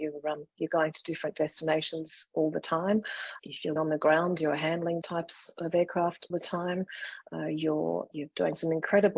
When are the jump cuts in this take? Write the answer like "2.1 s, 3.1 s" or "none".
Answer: 3.4 s, 3.8 s, 5.0 s, 6.3 s, 8.1 s